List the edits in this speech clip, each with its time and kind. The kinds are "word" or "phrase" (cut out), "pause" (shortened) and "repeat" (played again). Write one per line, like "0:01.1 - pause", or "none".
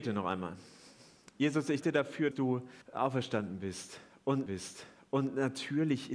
0:01.8 - word
0:02.3 - word
0:02.8 - pause
0:04.5 - repeat